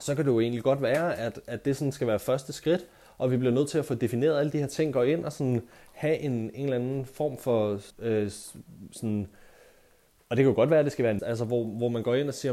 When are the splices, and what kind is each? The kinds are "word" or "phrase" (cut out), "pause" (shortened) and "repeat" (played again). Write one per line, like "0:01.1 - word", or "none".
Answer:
0:07.9 - pause
0:11.2 - phrase